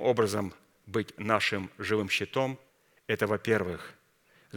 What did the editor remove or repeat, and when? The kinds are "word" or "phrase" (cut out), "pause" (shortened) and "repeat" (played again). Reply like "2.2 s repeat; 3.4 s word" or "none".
2.7 s pause